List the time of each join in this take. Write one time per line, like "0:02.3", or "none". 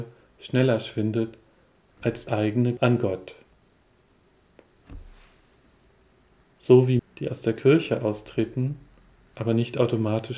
0:02.3
0:02.8
0:07.0